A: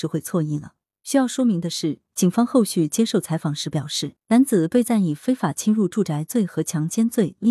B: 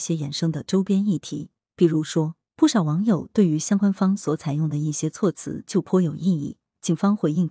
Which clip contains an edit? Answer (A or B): A